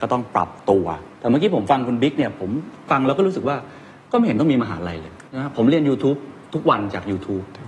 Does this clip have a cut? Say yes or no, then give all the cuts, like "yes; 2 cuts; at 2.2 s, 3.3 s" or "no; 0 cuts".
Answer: yes; 1 cut; at 5.3 s